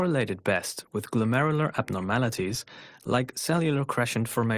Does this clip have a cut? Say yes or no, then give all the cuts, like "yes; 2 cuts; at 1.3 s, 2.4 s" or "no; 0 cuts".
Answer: no; 0 cuts